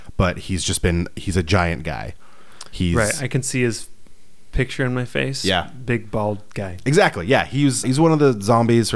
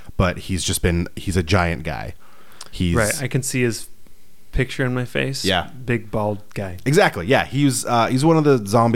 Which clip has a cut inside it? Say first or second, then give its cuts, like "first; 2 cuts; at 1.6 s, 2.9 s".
first; 1 cut; at 7.8 s